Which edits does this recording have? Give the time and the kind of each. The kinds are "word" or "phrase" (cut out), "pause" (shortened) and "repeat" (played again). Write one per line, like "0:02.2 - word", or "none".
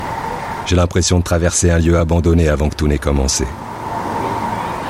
none